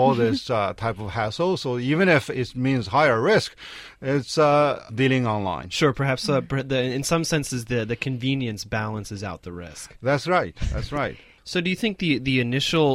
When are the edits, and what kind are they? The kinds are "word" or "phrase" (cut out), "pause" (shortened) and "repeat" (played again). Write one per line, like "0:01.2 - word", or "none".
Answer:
0:04.9 - phrase
0:11.4 - pause